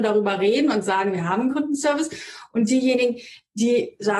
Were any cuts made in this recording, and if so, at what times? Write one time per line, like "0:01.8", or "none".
0:01.5